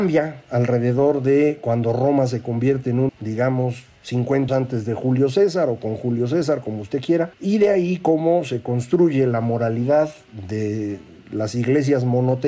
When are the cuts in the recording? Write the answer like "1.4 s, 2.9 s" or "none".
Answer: 3.1 s, 4.5 s